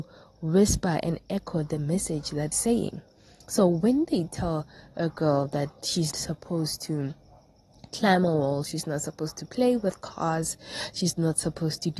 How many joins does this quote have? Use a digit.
2